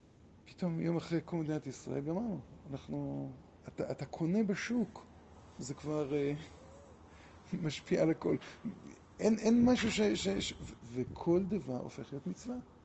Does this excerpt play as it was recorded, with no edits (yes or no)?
yes